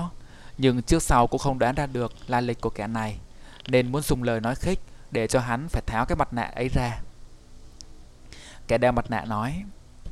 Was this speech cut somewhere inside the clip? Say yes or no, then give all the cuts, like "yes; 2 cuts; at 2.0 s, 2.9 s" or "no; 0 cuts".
no; 0 cuts